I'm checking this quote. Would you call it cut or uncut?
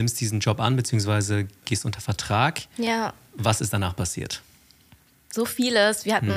uncut